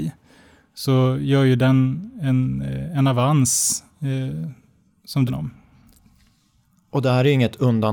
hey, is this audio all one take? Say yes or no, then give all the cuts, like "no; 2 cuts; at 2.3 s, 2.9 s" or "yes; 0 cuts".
no; 1 cut; at 5.3 s